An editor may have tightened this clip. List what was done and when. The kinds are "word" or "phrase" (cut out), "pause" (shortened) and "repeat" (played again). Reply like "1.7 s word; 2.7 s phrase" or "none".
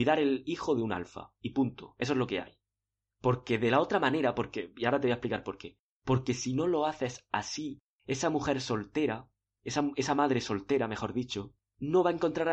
none